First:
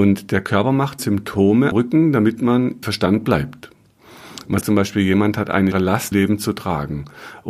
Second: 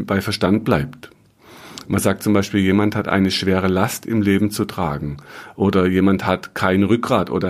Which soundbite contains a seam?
first; 6 cuts; at 1.0 s, 1.7 s, 2.8 s, 4.6 s, 5.7 s, 6.1 s

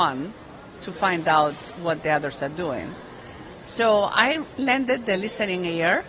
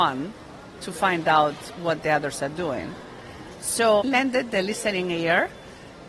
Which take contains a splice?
second; 1 cut; at 4.0 s

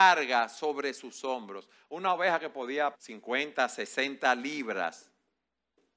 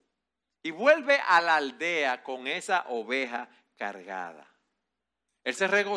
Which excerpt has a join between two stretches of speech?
first; 1 cut; at 2.9 s

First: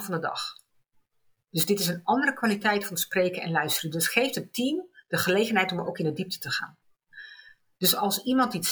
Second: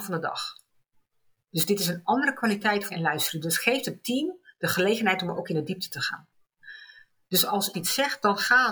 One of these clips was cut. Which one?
second; 2 cuts; at 2.9 s, 7.7 s

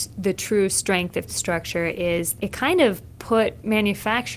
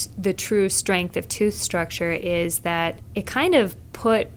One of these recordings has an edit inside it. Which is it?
first; 2 cuts; at 1.3 s, 2.4 s

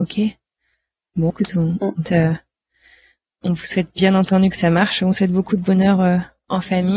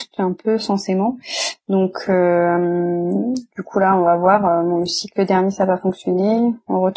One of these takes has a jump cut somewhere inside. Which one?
first; 2 cuts; at 1.3 s, 2.0 s

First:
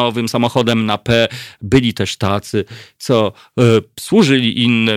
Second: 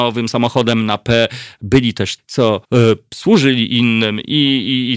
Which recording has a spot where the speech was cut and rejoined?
second; 2 cuts; at 2.2 s, 2.6 s

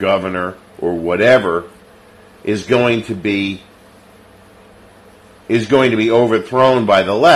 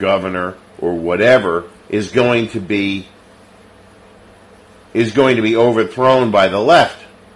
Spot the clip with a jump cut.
second; 1 cut; at 1.8 s

